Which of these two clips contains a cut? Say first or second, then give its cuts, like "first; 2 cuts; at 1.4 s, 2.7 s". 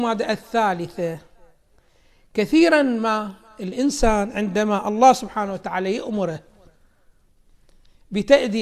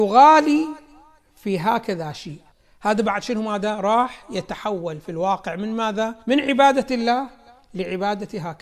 second; 2 cuts; at 2.5 s, 6.2 s